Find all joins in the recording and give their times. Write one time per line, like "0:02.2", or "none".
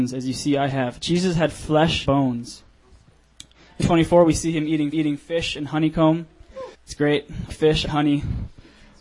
0:02.1
0:03.8
0:04.9
0:06.7
0:07.5
0:07.8